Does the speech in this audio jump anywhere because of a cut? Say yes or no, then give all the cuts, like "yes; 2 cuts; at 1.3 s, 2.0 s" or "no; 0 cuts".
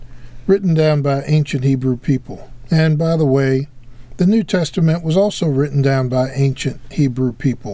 no; 0 cuts